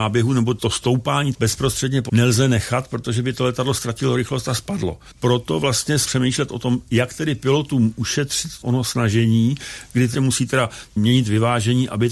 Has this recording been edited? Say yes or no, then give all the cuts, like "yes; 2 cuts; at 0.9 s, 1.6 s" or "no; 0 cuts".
yes; 3 cuts; at 1.3 s, 2.1 s, 6.0 s